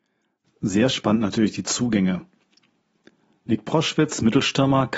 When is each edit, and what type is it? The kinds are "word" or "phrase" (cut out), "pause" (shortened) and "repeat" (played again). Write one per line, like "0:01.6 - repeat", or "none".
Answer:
none